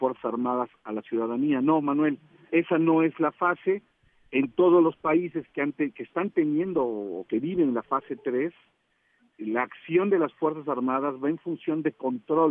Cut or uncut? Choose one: cut